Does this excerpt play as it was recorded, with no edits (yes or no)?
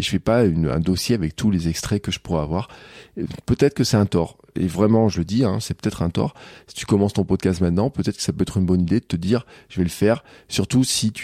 yes